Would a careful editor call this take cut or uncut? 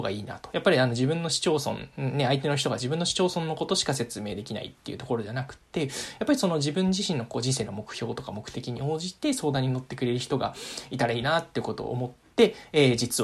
uncut